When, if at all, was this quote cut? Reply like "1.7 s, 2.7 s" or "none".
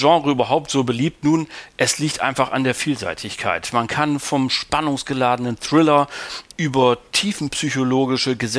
6.5 s